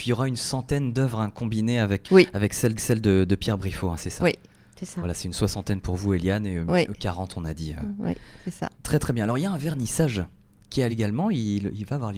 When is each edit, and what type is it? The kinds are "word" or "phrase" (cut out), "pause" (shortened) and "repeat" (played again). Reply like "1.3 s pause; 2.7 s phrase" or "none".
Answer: 2.0 s word; 2.8 s repeat; 8.7 s pause; 10.9 s word